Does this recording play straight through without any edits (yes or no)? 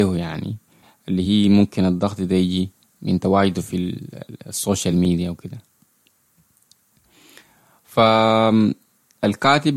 yes